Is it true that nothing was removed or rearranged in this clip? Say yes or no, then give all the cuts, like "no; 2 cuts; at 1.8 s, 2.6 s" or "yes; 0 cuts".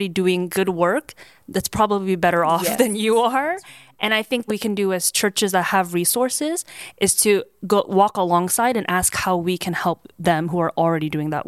no; 1 cut; at 4.5 s